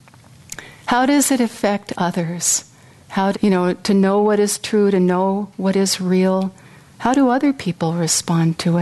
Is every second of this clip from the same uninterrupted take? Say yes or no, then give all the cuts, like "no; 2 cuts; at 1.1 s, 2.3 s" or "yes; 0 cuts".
no; 1 cut; at 3.3 s